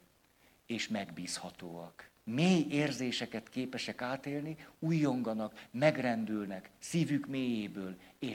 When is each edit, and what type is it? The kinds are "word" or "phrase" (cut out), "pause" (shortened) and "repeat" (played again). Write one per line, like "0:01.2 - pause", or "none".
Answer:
0:02.2 - pause